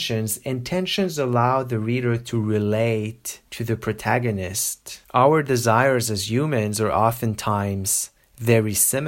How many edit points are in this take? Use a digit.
2